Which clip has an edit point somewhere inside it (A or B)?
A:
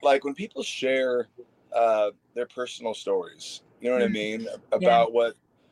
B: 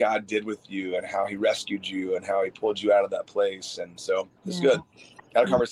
B